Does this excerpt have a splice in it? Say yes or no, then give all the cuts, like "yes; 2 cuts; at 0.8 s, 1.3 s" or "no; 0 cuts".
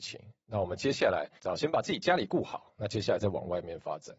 yes; 1 cut; at 1.4 s